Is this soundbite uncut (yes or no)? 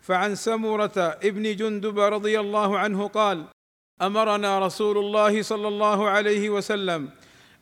yes